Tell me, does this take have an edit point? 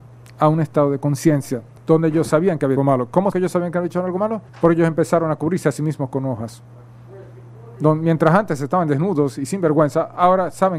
yes; 4 cuts; at 1.8 s, 2.8 s, 3.3 s, 4.5 s

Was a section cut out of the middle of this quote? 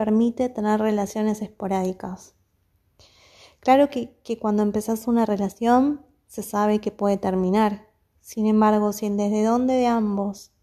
no; 0 cuts

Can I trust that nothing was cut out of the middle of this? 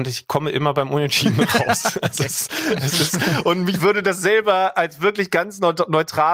yes; 0 cuts

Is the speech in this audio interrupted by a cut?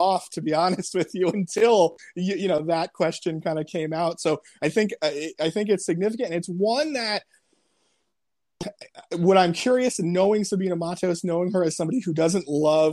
no; 0 cuts

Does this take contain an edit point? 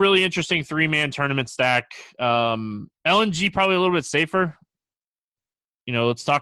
yes; 1 cut; at 3.0 s

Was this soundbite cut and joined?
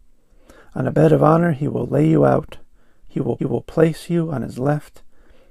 yes; 1 cut; at 3.4 s

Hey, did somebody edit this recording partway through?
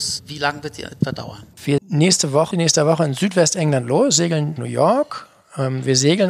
yes; 3 cuts; at 1.8 s, 2.5 s, 4.6 s

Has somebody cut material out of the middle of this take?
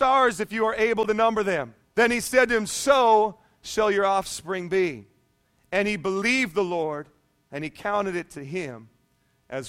yes; 1 cut; at 1.8 s

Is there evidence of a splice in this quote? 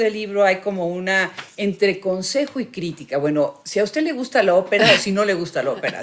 no; 0 cuts

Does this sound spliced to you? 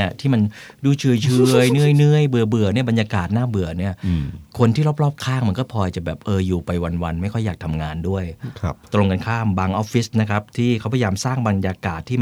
no; 0 cuts

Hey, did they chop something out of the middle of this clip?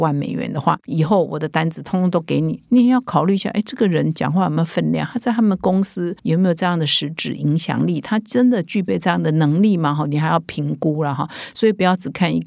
yes; 1 cut; at 6.2 s

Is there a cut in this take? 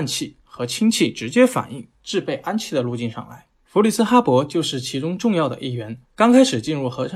yes; 3 cuts; at 2.0 s, 3.5 s, 6.0 s

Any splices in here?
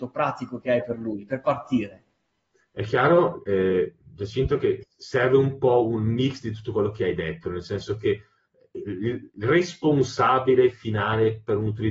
no; 0 cuts

